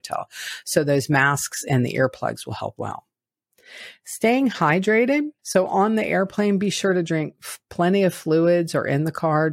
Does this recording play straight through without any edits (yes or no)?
no